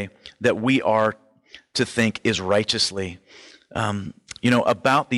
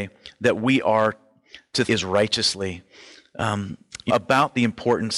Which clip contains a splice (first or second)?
second